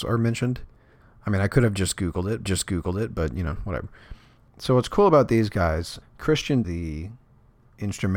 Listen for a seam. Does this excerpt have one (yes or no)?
yes